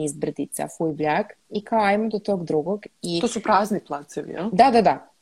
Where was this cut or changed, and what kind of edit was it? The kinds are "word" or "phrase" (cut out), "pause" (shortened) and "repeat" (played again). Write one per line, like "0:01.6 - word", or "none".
0:01.4 - pause
0:02.9 - pause